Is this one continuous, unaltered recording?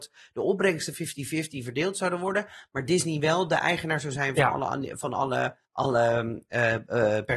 no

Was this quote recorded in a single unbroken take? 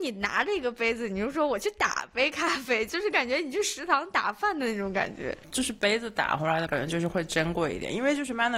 no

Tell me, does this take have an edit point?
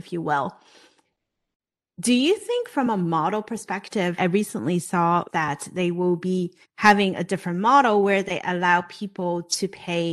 yes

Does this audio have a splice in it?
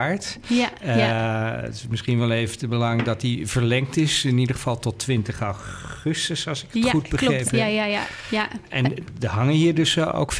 no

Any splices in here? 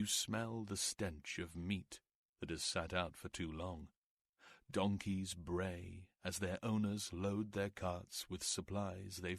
no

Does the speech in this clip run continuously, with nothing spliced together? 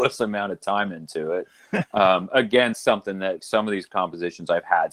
no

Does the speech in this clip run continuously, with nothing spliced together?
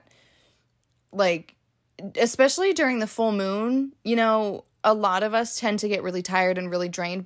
yes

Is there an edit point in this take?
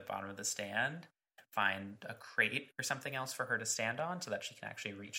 no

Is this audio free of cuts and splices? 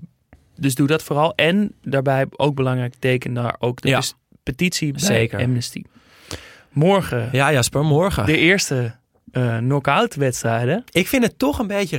yes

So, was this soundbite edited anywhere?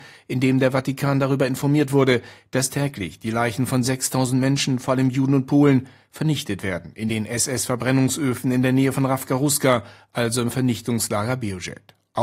no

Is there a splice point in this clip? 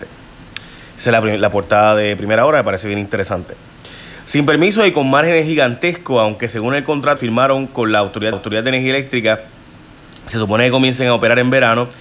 yes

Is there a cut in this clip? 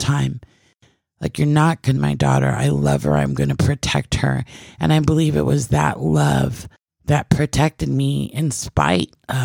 yes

